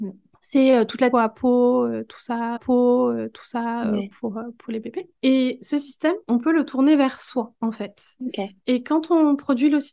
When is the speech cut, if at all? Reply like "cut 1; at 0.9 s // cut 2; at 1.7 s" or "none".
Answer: cut 1; at 1.1 s // cut 2; at 2.6 s // cut 3; at 5.2 s // cut 4; at 7.6 s